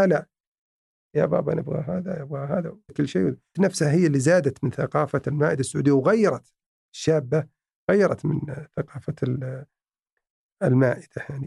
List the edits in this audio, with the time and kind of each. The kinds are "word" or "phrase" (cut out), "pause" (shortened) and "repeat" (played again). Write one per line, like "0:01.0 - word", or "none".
0:02.9 - word
0:03.5 - word